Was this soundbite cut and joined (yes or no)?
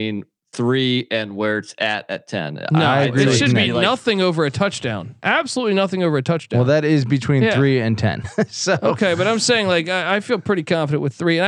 no